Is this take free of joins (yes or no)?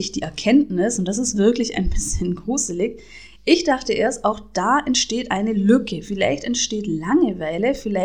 yes